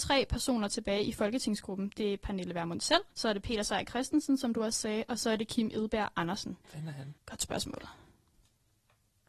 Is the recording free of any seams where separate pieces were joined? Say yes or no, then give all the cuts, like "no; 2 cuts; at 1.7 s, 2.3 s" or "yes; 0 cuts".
no; 3 cuts; at 3.1 s, 6.6 s, 7.2 s